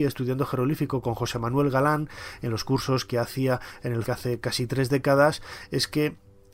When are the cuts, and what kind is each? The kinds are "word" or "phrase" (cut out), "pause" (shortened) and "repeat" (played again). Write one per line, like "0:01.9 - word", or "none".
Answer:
0:04.1 - word